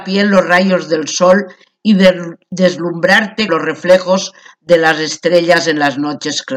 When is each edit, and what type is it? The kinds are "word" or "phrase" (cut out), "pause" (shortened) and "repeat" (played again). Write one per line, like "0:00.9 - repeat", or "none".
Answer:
0:03.5 - word